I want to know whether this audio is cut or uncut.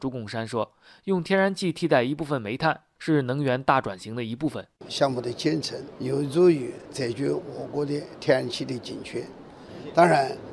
cut